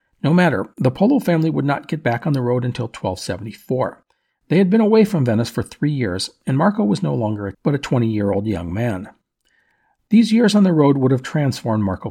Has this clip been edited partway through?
yes; 1 cut; at 7.5 s

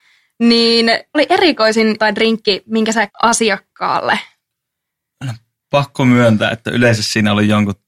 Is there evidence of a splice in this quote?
yes; 3 cuts; at 1.1 s, 2.0 s, 3.1 s

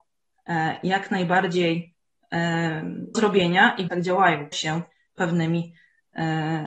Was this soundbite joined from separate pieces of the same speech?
yes; 3 cuts; at 3.1 s, 3.9 s, 4.5 s

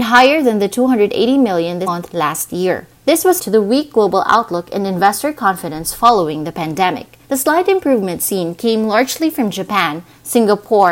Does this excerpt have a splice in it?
yes; 4 cuts; at 1.9 s, 2.9 s, 3.4 s, 7.2 s

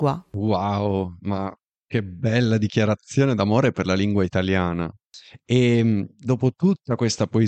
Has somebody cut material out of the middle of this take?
no; 0 cuts

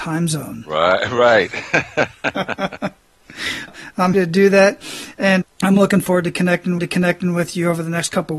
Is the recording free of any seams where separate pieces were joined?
no; 5 cuts; at 3.0 s, 3.7 s, 4.1 s, 5.4 s, 6.8 s

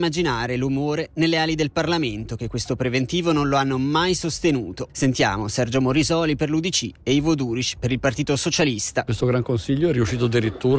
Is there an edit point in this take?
no; 0 cuts

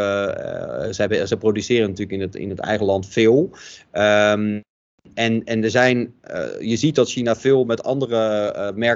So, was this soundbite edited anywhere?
no; 0 cuts

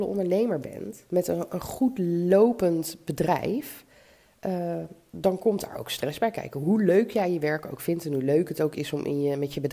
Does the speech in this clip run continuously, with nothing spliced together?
no; 1 cut; at 1.1 s

